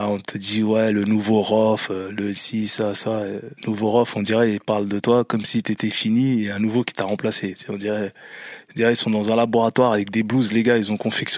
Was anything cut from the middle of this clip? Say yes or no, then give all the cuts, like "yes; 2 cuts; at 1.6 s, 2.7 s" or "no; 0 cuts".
yes; 1 cut; at 3.6 s